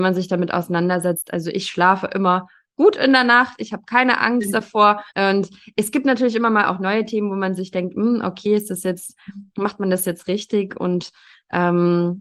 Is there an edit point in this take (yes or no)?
yes